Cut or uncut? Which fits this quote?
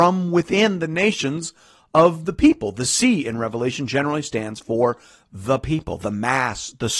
uncut